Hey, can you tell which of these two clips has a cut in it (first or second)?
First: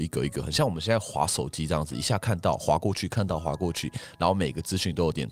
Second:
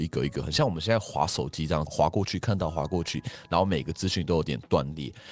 second